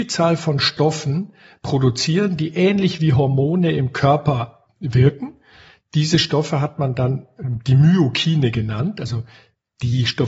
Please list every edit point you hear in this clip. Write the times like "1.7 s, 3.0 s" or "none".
none